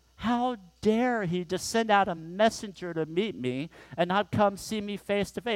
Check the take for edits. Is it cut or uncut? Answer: uncut